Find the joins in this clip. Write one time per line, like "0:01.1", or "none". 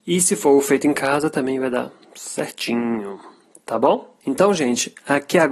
none